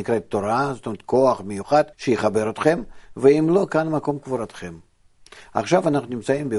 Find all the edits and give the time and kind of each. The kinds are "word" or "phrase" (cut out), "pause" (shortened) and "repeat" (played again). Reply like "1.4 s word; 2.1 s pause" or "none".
1.9 s pause